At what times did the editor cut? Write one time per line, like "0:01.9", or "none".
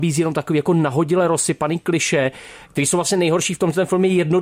none